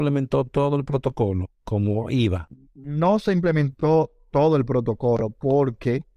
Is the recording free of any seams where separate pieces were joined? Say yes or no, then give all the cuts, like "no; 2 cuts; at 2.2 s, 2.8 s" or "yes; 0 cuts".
no; 2 cuts; at 1.6 s, 2.6 s